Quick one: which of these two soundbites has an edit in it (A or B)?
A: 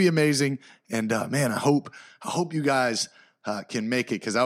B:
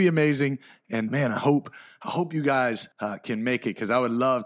B